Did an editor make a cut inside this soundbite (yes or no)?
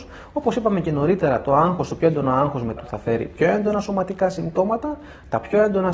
yes